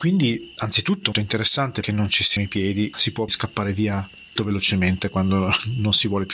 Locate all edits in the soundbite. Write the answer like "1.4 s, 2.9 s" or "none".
1.1 s, 1.8 s, 2.4 s, 3.3 s, 4.4 s

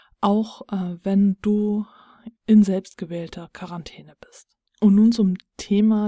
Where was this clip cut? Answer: 2.4 s, 4.7 s

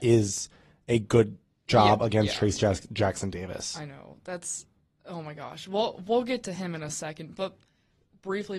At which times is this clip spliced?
none

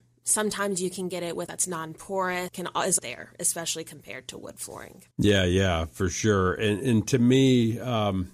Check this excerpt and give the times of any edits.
1.5 s, 2.5 s, 3.0 s, 5.1 s

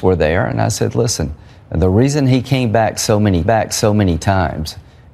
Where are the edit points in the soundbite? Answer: 3.4 s

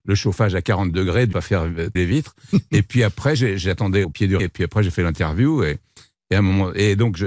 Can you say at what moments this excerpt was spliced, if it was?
1.3 s, 2.0 s, 4.0 s, 4.4 s

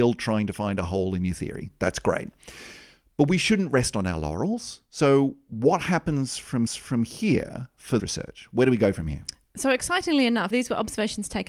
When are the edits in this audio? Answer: 6.7 s, 8.0 s, 10.5 s

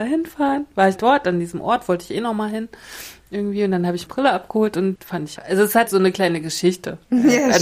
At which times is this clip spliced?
1.0 s, 4.1 s, 4.9 s, 5.4 s, 5.9 s

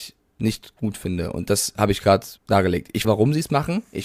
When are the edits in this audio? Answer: 2.4 s, 3.0 s

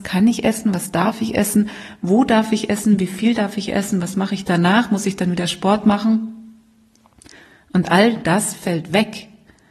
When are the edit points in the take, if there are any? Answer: none

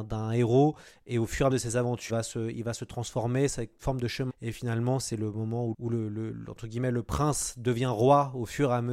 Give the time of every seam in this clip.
1.5 s, 2.1 s, 3.8 s, 4.3 s, 5.7 s

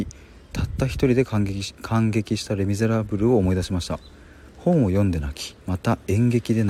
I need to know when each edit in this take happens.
4.5 s, 5.6 s

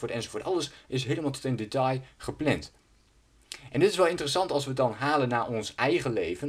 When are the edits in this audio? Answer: none

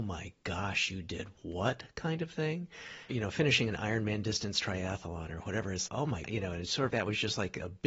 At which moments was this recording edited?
3.1 s, 5.9 s, 6.2 s, 6.9 s

